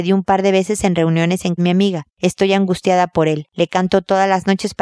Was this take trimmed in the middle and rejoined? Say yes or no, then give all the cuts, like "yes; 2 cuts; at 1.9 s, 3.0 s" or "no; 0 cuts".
yes; 1 cut; at 1.6 s